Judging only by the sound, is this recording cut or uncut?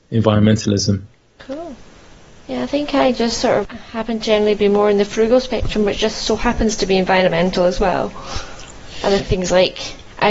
uncut